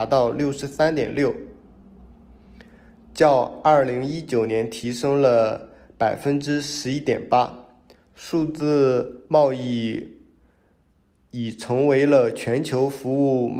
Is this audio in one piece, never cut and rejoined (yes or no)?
yes